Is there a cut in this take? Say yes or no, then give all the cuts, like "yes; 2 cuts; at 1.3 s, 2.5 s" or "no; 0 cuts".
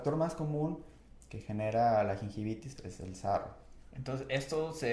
yes; 1 cut; at 2.8 s